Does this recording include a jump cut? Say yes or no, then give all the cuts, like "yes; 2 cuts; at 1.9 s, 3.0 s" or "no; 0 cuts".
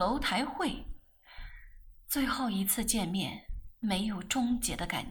yes; 1 cut; at 3.8 s